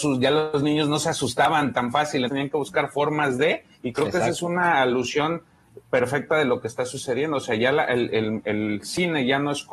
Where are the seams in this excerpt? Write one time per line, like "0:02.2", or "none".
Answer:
0:02.3
0:03.7